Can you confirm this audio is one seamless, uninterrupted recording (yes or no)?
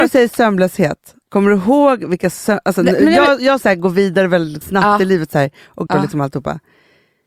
no